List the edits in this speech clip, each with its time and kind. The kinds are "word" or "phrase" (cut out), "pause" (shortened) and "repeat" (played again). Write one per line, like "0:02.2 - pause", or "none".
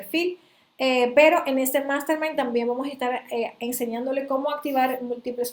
none

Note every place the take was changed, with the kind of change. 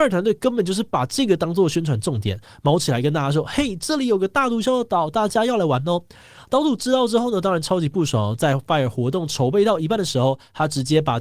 none

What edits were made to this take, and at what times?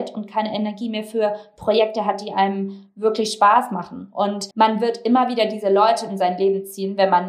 0:04.5 - pause

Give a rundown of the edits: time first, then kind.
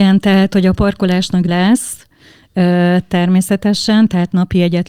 0:01.5 - word

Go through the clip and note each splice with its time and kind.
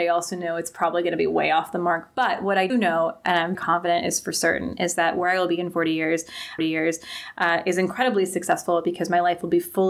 0:02.7 - word
0:03.5 - word
0:06.6 - repeat

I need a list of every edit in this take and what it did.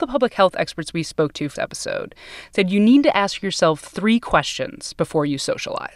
0:01.6 - word

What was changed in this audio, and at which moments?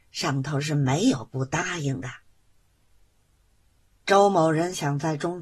none

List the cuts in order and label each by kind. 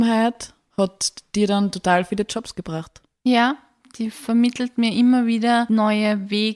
none

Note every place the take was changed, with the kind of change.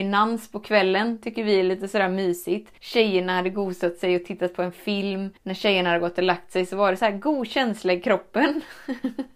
0:02.8 - pause
0:05.4 - pause

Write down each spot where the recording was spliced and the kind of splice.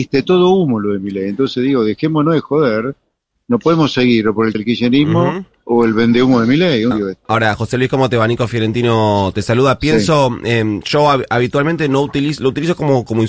0:04.5 - phrase
0:06.9 - word

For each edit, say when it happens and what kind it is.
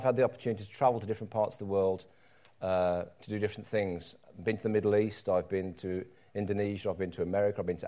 none

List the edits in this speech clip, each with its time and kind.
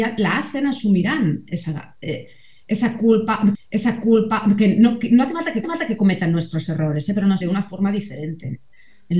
0:03.5 - repeat
0:05.6 - repeat
0:07.4 - word

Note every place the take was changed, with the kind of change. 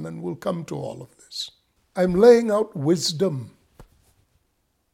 0:01.8 - pause

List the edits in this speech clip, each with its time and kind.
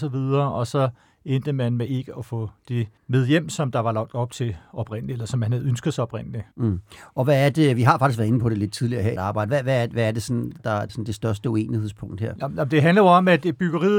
0:03.0 - pause
0:06.5 - pause
0:09.1 - word
0:10.6 - word
0:10.9 - word

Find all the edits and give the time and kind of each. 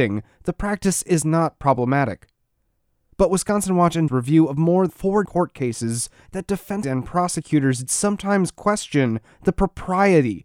0:04.1 - word
0:04.9 - word
0:05.2 - word
0:06.3 - word
0:06.8 - word
0:07.9 - word

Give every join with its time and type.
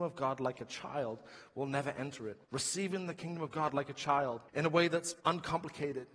0:02.4 - pause
0:04.5 - pause
0:05.2 - pause

